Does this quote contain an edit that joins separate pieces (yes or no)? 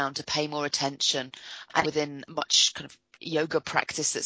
yes